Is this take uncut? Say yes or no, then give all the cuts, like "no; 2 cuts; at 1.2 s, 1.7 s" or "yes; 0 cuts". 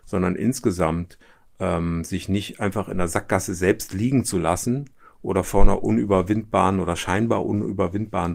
yes; 0 cuts